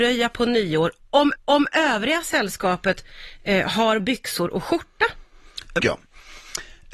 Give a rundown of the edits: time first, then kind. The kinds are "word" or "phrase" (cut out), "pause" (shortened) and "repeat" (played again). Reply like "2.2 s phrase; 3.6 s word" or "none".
1.4 s repeat; 4.0 s word; 5.8 s phrase